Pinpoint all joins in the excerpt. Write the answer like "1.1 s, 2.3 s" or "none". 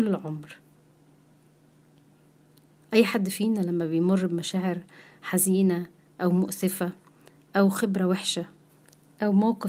none